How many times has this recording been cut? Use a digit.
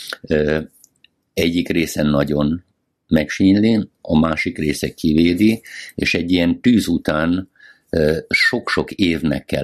0